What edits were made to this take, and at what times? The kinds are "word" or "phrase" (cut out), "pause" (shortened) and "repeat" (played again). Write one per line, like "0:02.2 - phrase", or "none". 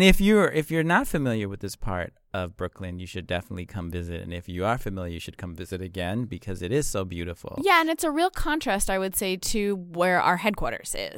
none